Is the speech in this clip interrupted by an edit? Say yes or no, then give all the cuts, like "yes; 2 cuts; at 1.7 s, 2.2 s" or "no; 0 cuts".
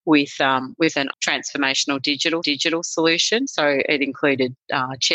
yes; 2 cuts; at 1.1 s, 2.4 s